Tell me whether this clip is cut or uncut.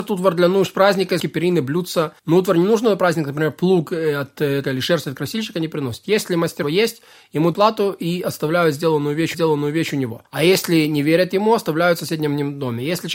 cut